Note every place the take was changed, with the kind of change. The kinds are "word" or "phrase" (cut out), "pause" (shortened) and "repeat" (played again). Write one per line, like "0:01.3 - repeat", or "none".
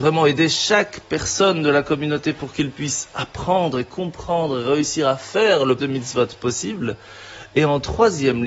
0:05.8 - word